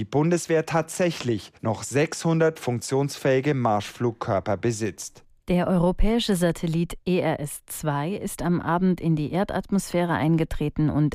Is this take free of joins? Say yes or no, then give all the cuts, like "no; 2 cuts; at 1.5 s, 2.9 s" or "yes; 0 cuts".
no; 1 cut; at 1.5 s